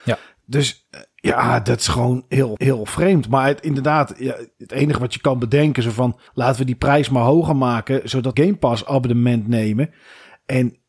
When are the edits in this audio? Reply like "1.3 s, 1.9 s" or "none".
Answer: 2.6 s, 6.3 s, 8.3 s